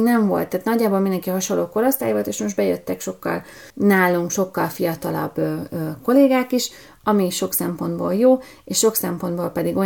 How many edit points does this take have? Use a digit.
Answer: 1